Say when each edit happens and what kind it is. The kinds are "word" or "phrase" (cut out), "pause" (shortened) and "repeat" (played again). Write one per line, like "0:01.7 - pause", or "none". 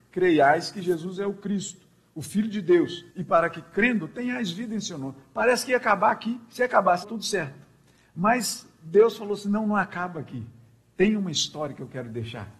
0:03.1 - pause
0:07.0 - phrase